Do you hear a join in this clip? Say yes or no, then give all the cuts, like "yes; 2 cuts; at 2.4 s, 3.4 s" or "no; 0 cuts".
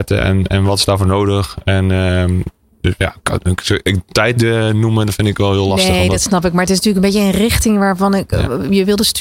no; 0 cuts